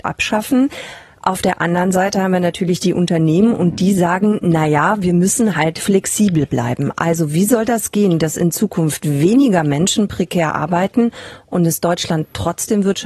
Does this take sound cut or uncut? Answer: uncut